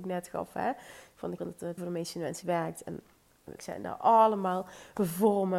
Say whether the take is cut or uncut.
cut